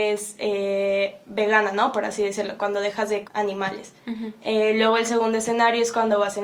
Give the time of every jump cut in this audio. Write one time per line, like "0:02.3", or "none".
0:03.2